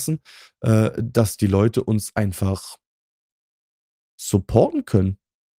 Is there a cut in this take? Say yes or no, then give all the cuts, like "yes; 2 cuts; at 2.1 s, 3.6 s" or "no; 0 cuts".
no; 0 cuts